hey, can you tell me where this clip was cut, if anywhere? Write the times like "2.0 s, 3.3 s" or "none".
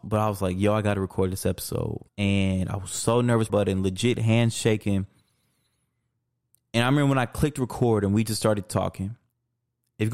2.1 s, 3.5 s